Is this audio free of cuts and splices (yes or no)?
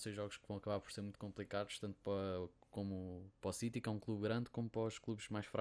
yes